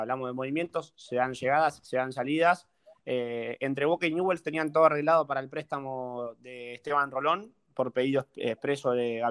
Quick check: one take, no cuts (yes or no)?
yes